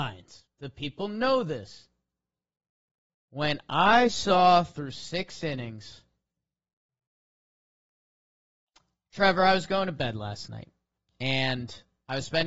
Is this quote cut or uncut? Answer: uncut